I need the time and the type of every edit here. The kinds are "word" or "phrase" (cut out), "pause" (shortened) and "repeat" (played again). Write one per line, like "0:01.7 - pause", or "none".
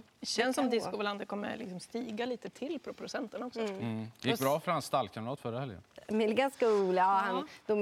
none